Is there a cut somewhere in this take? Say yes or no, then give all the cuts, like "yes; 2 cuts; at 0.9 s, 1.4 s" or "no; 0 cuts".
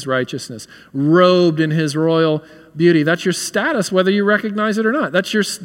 no; 0 cuts